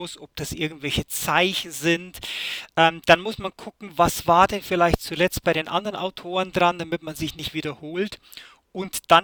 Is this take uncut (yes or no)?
yes